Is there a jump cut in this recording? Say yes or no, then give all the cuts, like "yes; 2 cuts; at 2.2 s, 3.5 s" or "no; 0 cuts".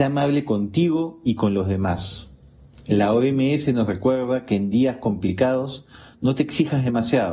no; 0 cuts